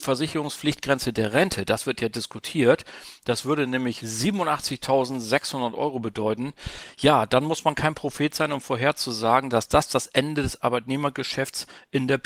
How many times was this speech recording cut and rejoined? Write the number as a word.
zero